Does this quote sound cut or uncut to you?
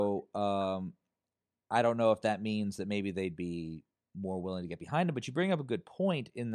uncut